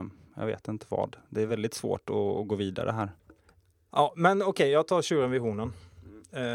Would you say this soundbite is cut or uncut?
uncut